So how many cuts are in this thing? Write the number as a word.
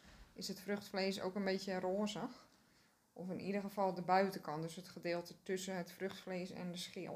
zero